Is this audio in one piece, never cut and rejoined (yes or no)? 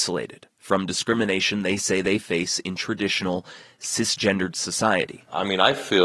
yes